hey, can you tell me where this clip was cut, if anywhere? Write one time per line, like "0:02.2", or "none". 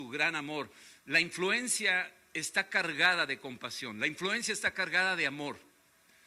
0:01.0